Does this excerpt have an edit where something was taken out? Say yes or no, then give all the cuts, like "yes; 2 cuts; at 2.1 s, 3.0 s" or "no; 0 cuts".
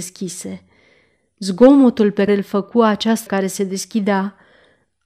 yes; 2 cuts; at 2.3 s, 3.3 s